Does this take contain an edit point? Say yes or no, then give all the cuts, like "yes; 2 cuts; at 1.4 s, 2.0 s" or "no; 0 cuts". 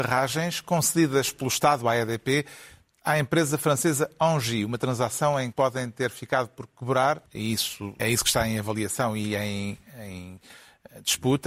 yes; 3 cuts; at 5.5 s, 7.3 s, 8.0 s